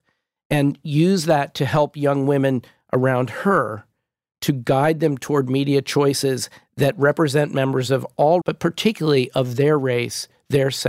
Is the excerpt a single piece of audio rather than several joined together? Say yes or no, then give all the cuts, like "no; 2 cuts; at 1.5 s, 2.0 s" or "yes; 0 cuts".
no; 1 cut; at 8.4 s